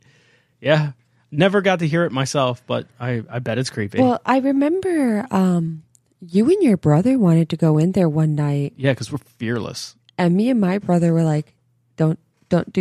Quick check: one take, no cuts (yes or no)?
yes